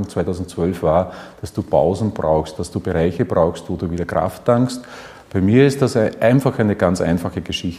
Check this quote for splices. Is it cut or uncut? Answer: uncut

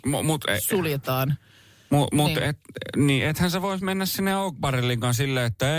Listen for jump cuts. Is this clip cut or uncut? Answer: uncut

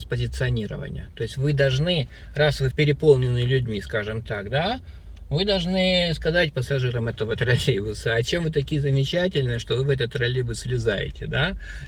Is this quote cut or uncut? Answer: cut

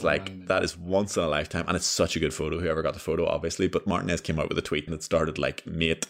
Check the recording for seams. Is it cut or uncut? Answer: cut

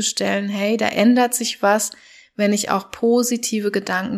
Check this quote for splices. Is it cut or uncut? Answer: uncut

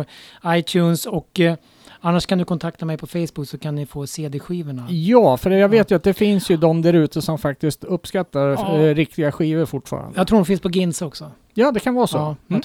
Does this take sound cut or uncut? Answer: uncut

